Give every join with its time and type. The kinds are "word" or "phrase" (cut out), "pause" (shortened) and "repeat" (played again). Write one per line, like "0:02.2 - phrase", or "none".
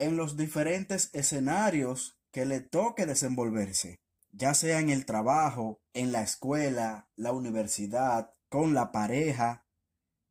0:02.2 - pause
0:04.2 - pause
0:05.9 - pause
0:08.4 - pause